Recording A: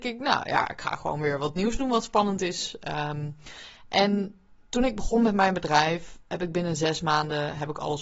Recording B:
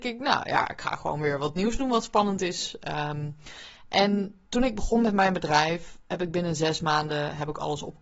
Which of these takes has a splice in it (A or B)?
B